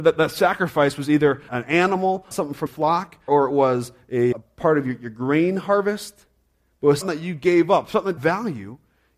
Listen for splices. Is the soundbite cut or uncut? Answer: cut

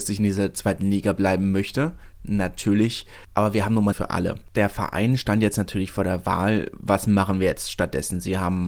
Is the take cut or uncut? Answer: cut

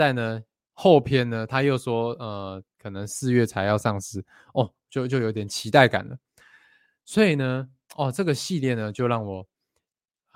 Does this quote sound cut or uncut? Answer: uncut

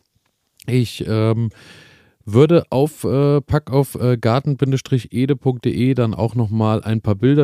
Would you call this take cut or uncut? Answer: uncut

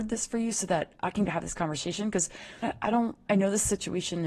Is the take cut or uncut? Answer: cut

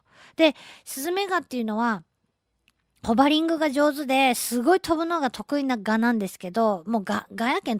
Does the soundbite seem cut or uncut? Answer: uncut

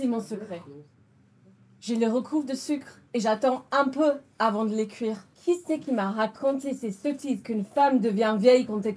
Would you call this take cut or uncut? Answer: cut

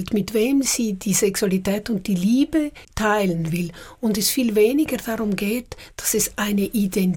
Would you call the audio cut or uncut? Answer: cut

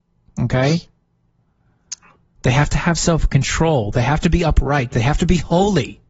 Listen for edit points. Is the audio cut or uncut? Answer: uncut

